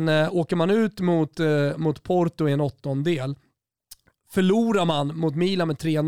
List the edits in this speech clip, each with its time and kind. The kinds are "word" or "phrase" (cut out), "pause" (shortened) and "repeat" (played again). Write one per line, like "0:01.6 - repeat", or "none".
none